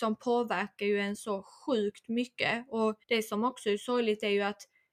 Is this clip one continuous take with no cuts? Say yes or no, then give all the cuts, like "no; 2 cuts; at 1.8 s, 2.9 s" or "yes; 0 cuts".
no; 1 cut; at 3.0 s